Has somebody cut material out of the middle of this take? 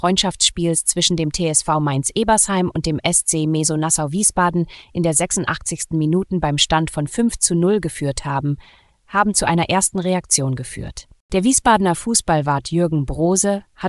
no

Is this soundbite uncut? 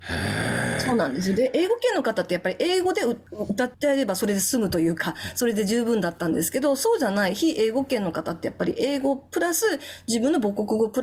no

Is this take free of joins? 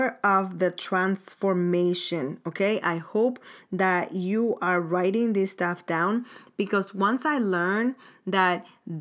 yes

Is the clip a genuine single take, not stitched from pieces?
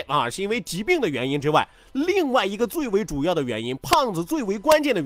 yes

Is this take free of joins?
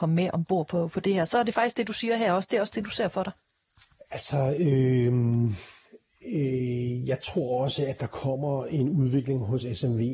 yes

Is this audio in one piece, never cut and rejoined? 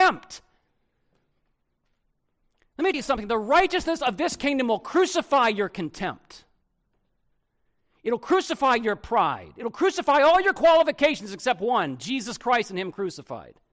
no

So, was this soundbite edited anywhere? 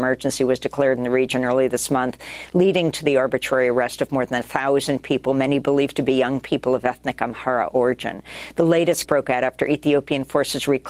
yes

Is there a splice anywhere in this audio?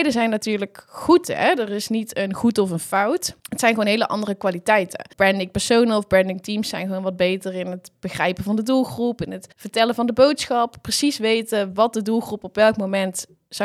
yes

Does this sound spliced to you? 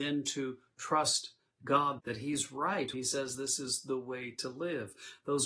yes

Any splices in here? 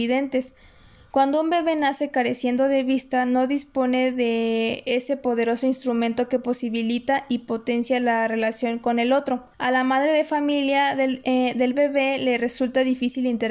yes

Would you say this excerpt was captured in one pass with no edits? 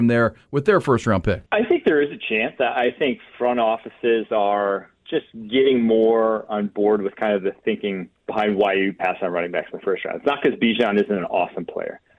no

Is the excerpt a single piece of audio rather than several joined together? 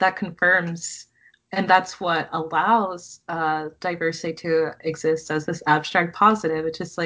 yes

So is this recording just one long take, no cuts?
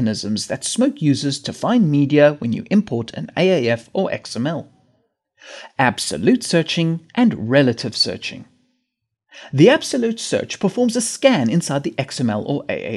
no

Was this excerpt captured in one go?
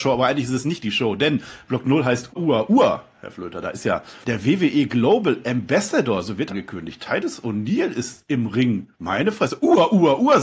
no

